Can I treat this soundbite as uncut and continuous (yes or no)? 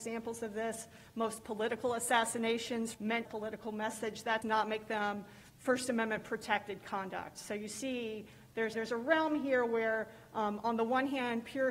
no